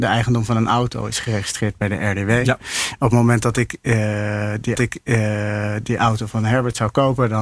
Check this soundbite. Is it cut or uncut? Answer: cut